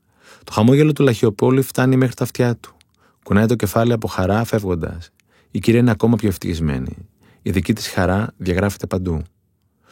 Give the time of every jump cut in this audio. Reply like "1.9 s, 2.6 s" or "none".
none